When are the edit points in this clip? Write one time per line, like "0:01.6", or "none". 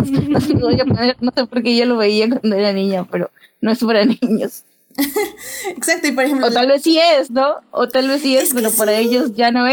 none